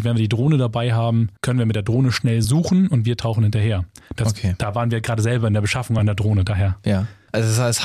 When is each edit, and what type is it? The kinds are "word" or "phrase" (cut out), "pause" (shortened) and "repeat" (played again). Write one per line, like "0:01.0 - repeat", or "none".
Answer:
none